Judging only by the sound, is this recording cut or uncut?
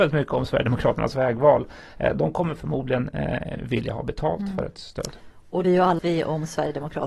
cut